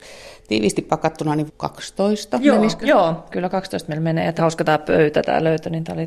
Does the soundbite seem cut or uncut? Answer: cut